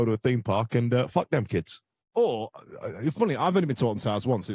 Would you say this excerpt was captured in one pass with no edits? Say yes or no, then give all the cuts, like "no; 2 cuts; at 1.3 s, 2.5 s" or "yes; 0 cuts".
yes; 0 cuts